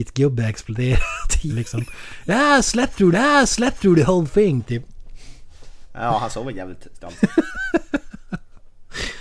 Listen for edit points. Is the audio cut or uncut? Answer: cut